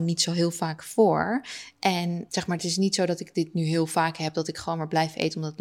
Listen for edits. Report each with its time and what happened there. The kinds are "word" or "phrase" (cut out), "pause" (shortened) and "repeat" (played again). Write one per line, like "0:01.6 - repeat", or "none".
none